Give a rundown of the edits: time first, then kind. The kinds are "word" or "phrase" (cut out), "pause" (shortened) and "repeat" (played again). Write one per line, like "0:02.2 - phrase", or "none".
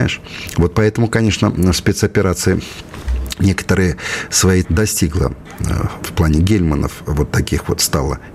0:04.6 - word
0:06.0 - word